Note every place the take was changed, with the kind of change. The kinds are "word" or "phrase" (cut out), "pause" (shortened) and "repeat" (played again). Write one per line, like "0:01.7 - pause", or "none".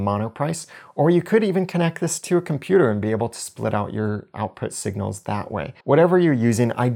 0:05.8 - pause